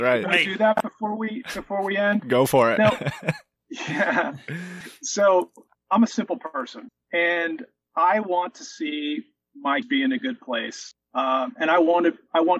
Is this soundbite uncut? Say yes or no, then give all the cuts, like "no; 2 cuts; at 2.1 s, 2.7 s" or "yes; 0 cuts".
no; 1 cut; at 9.8 s